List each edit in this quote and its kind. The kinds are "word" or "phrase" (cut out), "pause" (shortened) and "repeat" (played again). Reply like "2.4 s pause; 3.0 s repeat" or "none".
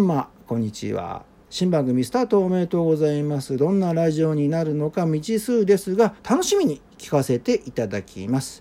6.2 s pause